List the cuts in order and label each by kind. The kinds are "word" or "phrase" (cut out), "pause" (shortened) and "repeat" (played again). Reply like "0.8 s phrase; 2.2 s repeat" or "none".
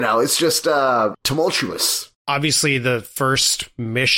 1.1 s word